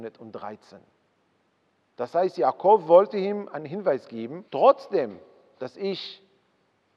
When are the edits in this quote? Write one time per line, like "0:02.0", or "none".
0:04.5